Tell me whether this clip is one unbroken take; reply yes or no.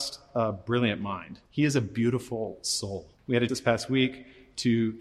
no